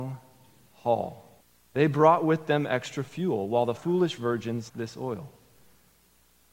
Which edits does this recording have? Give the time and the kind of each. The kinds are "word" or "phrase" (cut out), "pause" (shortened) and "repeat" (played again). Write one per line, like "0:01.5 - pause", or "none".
0:01.4 - pause
0:03.8 - word
0:04.7 - word